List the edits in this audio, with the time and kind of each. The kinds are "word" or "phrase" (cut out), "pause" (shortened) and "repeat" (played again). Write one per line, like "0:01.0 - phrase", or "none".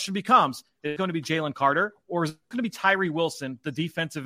0:01.0 - word
0:02.5 - word